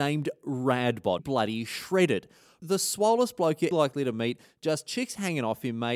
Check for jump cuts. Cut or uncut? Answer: cut